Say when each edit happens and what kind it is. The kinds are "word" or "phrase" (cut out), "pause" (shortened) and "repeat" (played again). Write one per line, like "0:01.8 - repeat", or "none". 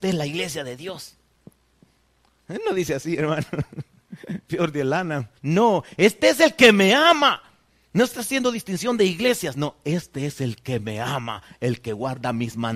0:05.4 - pause
0:07.7 - pause